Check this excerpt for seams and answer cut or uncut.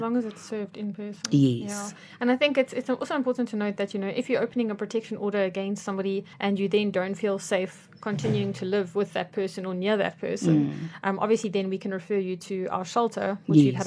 cut